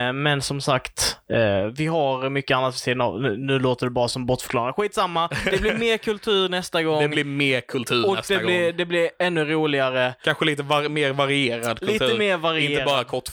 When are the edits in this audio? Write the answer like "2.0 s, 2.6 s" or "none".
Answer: none